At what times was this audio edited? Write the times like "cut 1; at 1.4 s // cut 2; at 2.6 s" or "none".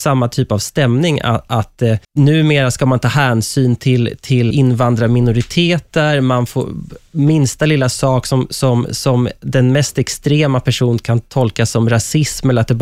cut 1; at 2.0 s // cut 2; at 4.5 s